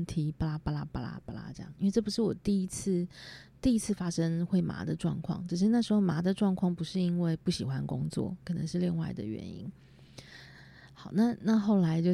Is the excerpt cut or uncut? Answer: cut